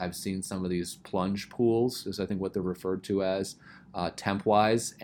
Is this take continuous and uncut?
yes; 0 cuts

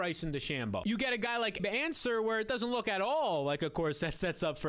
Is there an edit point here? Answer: yes; 1 cut; at 1.6 s

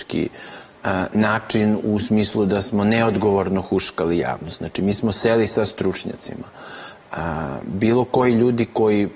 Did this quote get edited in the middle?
no; 0 cuts

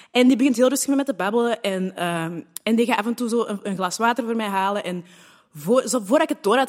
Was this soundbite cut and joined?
no; 0 cuts

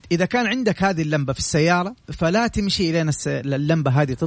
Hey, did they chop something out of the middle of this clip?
yes; 1 cut; at 2.0 s

